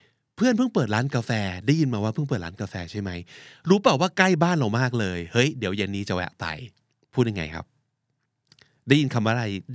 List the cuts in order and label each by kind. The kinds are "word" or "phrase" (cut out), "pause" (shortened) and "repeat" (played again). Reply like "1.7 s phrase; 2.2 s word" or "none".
none